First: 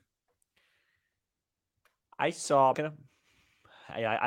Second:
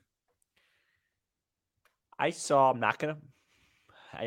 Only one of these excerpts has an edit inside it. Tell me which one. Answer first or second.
first